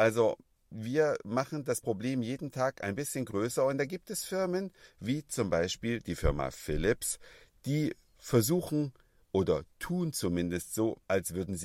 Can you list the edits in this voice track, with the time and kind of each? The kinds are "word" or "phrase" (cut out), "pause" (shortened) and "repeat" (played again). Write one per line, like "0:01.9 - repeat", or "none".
none